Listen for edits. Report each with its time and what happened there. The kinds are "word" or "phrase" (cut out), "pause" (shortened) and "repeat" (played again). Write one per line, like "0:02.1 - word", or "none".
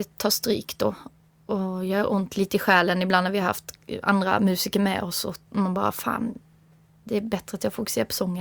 none